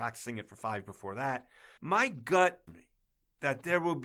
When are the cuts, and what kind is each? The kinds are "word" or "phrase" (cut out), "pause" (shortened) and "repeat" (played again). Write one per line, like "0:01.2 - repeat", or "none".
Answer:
0:01.8 - word
0:02.7 - word